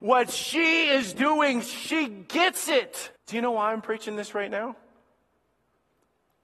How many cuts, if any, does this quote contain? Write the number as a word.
one